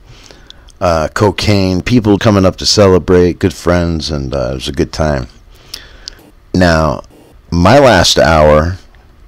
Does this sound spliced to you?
yes; 2 cuts; at 2.2 s, 6.3 s

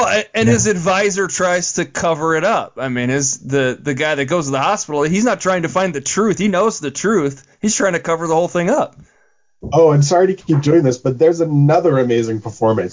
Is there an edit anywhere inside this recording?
no; 0 cuts

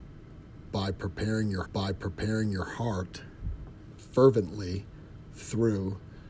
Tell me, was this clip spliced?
yes; 1 cut; at 1.6 s

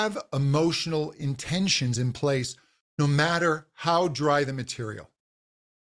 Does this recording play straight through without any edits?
yes; 0 cuts

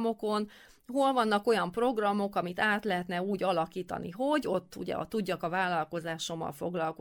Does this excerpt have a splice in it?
no; 0 cuts

